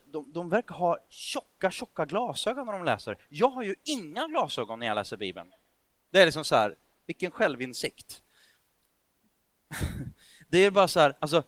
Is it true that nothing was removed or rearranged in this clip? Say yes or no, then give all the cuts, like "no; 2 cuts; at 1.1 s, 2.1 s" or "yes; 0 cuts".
yes; 0 cuts